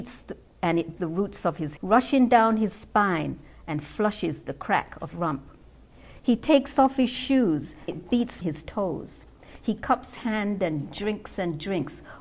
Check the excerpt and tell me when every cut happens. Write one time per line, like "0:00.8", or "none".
0:01.0
0:01.8
0:05.1
0:07.9
0:08.4
0:10.2